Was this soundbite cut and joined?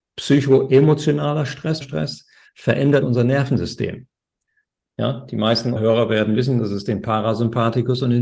yes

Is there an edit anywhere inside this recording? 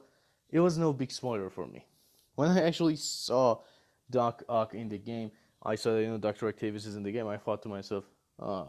no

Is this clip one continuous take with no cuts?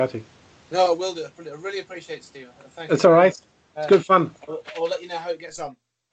yes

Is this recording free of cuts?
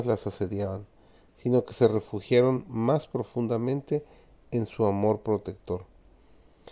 yes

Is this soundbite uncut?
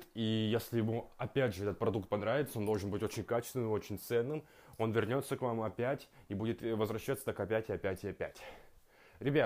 yes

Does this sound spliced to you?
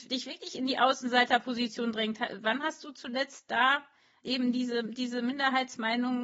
no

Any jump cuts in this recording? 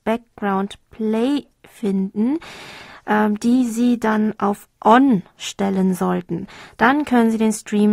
no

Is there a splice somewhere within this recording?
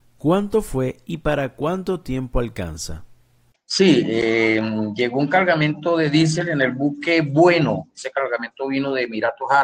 no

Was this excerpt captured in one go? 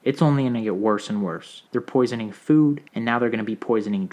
no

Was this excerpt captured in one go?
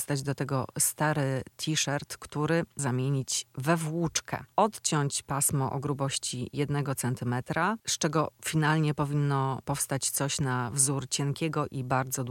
no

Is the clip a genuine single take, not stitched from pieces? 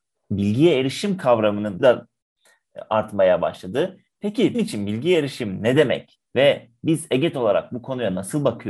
no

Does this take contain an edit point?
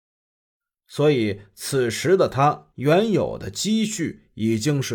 yes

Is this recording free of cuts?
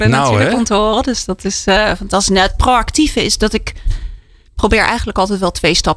yes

